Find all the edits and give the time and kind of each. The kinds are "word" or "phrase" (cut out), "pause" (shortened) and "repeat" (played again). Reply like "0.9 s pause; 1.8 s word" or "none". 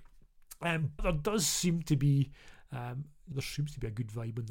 1.0 s word; 3.3 s word